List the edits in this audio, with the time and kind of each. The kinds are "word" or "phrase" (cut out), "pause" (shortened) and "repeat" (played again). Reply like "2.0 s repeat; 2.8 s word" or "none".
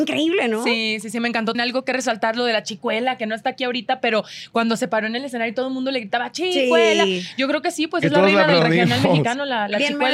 1.5 s word